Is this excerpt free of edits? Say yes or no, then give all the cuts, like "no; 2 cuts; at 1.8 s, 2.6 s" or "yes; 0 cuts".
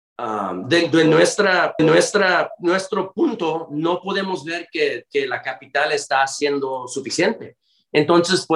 no; 1 cut; at 1.8 s